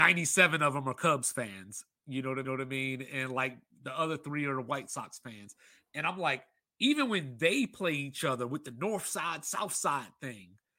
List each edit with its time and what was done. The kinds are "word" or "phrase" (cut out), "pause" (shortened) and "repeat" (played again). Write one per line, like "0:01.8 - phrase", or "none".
0:02.4 - repeat